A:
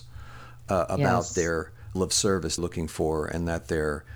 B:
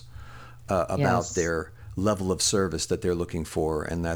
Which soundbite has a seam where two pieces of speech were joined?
A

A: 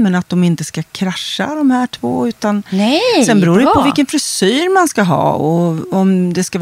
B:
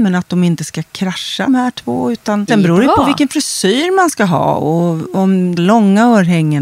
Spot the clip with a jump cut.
B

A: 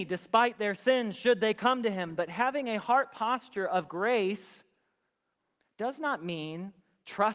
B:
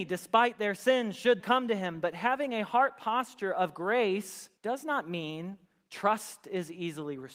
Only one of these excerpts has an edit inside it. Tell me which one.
B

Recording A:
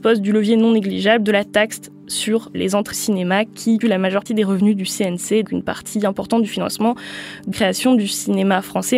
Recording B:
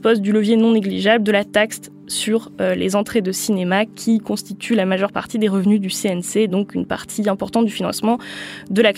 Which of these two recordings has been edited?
A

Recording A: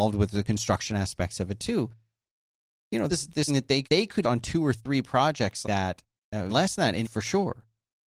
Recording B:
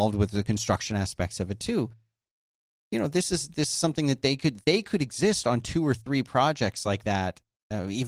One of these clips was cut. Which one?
A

